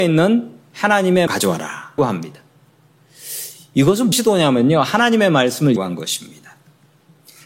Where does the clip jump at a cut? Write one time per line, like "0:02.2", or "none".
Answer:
0:01.3
0:02.0
0:04.1
0:05.8